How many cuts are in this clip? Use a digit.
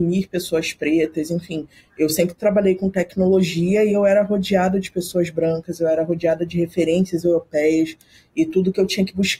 0